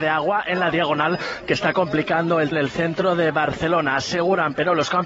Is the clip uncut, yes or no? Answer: no